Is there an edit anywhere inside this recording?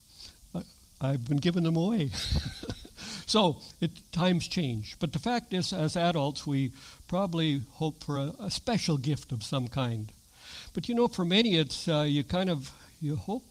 no; 0 cuts

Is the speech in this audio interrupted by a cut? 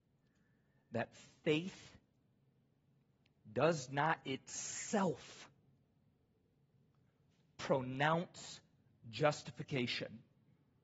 no; 0 cuts

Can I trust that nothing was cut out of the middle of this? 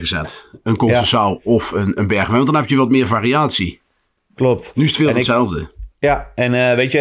yes; 0 cuts

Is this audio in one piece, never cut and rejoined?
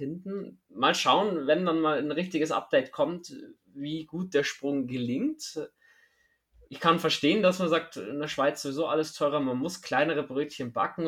yes; 0 cuts

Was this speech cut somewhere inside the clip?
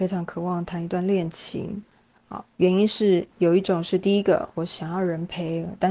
yes; 1 cut; at 2.5 s

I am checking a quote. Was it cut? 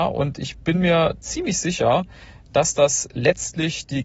no; 0 cuts

